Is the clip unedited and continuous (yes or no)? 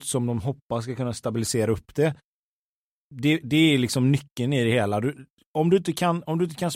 yes